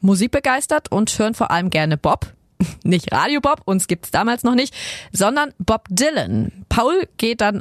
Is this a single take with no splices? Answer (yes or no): yes